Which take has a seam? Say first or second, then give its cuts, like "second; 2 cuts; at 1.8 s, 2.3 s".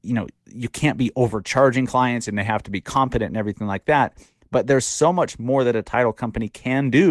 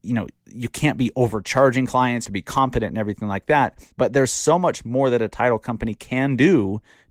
second; 2 cuts; at 2.3 s, 3.9 s